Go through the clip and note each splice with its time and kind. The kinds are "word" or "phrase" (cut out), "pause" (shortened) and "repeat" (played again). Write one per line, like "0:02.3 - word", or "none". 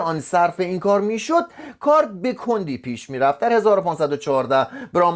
none